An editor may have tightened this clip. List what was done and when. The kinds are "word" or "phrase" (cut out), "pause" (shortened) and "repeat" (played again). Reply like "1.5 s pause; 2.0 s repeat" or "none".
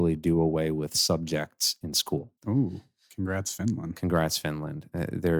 2.4 s pause